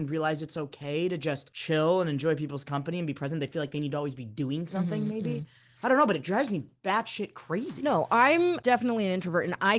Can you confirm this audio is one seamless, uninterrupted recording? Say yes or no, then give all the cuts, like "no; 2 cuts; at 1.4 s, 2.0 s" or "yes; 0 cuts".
yes; 0 cuts